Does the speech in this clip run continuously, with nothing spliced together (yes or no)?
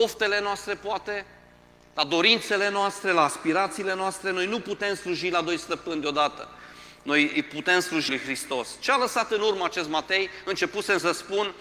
no